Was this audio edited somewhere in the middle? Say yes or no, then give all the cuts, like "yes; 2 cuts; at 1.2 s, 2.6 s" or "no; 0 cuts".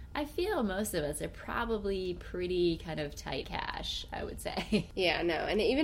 yes; 1 cut; at 3.4 s